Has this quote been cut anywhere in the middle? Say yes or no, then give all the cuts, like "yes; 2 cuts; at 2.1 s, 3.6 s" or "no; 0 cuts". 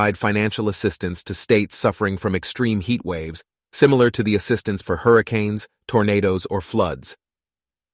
yes; 1 cut; at 4.8 s